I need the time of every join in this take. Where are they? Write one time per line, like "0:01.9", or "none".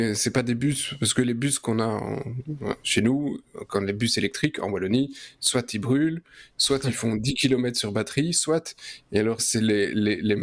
0:09.4